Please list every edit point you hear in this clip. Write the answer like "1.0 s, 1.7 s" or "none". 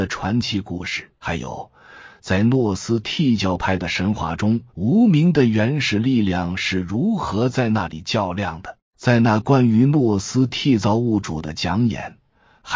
1.2 s, 4.7 s, 8.9 s